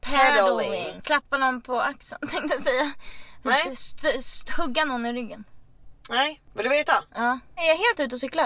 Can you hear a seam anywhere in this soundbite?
no; 0 cuts

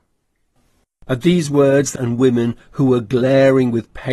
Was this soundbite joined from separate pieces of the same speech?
yes; 1 cut; at 2.0 s

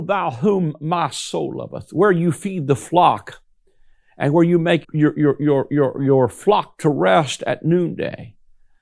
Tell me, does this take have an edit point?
yes; 1 cut; at 4.8 s

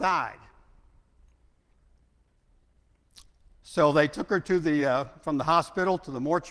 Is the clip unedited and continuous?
yes; 0 cuts

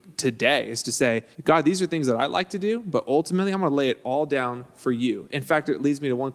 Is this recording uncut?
no; 1 cut; at 1.3 s

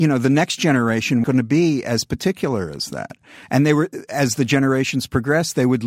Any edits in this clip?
yes; 1 cut; at 1.2 s

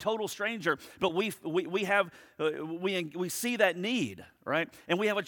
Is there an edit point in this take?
no; 0 cuts

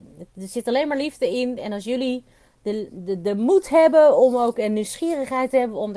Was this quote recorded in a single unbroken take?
yes; 0 cuts

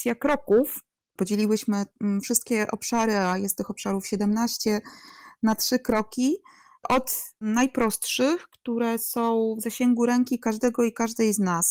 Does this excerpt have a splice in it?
no; 0 cuts

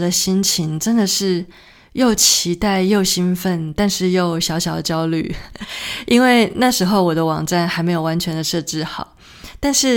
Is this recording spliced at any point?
no; 0 cuts

